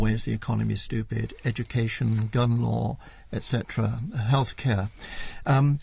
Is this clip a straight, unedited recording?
yes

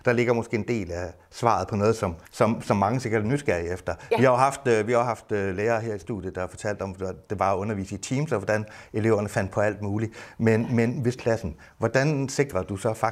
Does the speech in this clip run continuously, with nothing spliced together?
no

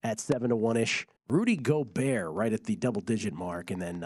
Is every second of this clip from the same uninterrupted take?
no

